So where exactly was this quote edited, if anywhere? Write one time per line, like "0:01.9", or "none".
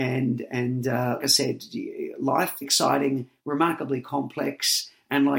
0:01.2
0:02.6
0:03.4